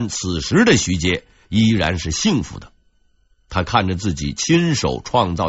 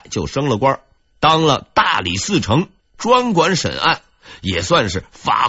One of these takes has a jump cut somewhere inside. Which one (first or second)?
second